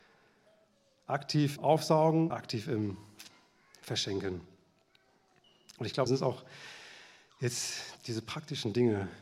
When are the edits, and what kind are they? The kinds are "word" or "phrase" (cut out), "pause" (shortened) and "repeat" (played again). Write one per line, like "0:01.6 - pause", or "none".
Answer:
0:01.6 - word
0:02.3 - word
0:06.1 - word
0:08.0 - word